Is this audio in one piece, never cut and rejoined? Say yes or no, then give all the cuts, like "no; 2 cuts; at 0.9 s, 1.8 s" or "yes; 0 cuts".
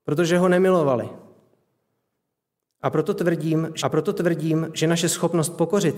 no; 1 cut; at 3.8 s